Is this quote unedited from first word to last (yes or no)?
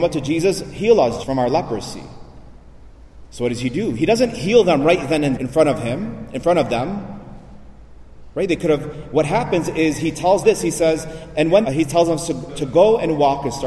no